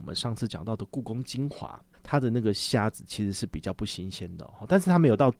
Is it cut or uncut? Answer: cut